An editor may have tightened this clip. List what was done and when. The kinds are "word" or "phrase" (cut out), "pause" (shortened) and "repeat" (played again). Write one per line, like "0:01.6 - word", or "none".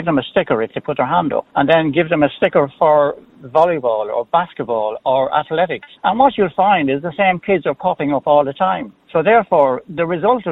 0:01.5 - pause
0:06.0 - pause
0:09.0 - pause